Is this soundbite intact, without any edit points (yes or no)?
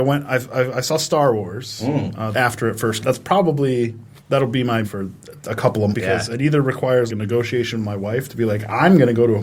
no